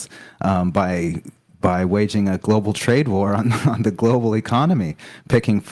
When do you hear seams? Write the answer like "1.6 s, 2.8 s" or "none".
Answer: none